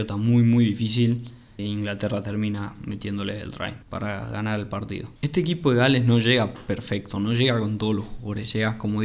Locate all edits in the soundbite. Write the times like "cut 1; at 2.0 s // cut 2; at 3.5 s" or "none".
cut 1; at 1.6 s // cut 2; at 3.8 s // cut 3; at 5.2 s